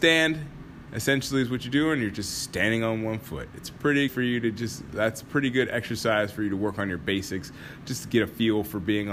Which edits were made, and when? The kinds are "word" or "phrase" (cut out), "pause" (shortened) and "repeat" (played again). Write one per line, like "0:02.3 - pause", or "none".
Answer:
0:04.1 - word

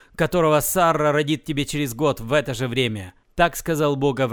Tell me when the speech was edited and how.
none

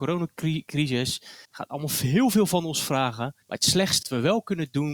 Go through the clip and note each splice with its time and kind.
0:01.4 - pause
0:03.4 - pause
0:04.0 - word

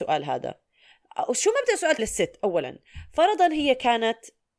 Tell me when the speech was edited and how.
0:02.0 - word

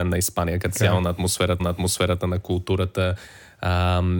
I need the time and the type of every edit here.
0:01.6 - repeat

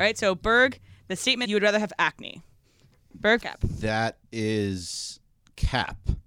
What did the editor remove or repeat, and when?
0:01.4 - word
0:03.4 - word
0:04.3 - pause

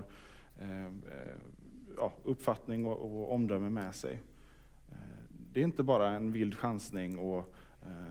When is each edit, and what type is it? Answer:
0:02.9 - word

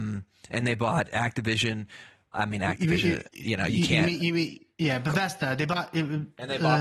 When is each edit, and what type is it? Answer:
0:02.3 - word

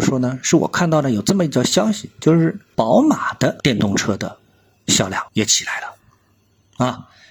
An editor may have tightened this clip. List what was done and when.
0:05.3 - pause

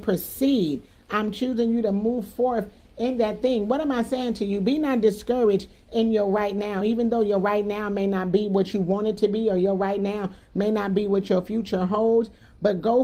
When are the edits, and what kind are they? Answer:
none

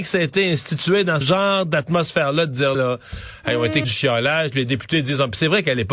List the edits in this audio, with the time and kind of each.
0:01.2 - word
0:02.7 - word
0:03.8 - word

